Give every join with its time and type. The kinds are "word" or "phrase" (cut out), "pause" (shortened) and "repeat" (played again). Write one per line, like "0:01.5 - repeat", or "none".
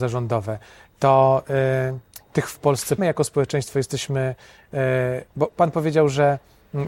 0:03.0 - word
0:05.3 - pause